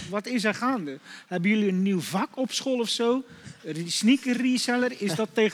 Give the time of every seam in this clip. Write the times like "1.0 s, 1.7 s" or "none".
none